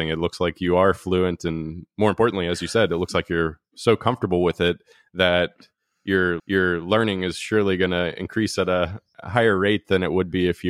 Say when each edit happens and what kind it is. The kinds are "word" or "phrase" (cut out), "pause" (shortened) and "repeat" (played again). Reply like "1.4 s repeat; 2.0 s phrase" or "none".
6.4 s repeat